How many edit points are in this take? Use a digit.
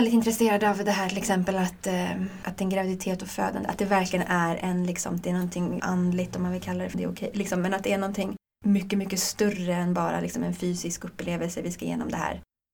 3